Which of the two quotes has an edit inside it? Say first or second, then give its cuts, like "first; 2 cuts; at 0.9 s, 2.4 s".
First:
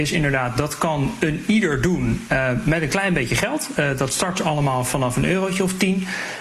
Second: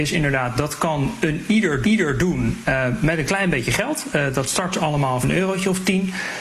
second; 2 cuts; at 1.8 s, 5.2 s